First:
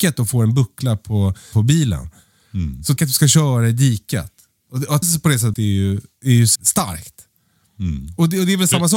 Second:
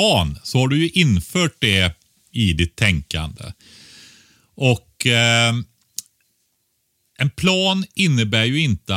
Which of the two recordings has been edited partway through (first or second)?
first